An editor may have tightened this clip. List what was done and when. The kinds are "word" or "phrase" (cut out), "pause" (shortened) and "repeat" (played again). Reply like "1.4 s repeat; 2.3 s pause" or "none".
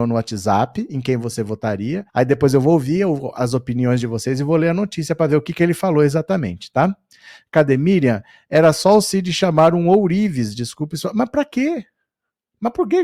2.1 s pause